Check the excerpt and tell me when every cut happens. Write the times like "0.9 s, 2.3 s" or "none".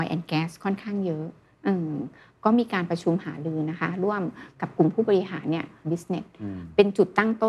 5.8 s